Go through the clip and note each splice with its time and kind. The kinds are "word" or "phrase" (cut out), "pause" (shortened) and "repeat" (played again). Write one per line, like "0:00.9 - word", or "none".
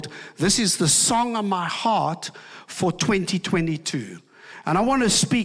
none